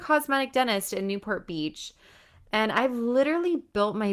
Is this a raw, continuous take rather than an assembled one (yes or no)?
yes